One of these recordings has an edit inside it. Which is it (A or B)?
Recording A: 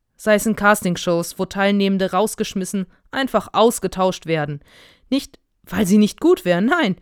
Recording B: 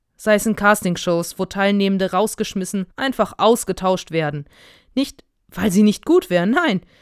B